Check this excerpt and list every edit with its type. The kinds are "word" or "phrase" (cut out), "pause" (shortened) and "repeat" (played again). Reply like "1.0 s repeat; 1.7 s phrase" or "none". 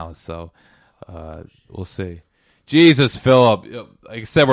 none